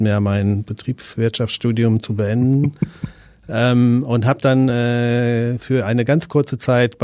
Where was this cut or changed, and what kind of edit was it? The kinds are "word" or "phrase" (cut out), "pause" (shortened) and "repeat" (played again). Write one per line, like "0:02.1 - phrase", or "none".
none